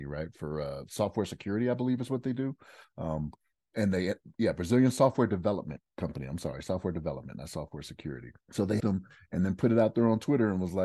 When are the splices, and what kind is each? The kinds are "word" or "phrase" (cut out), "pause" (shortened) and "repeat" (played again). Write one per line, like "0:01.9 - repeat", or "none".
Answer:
0:08.4 - pause
0:08.8 - word